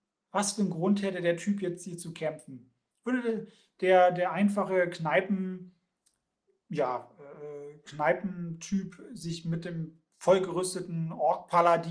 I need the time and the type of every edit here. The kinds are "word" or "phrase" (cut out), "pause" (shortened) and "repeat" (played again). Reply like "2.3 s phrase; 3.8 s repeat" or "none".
none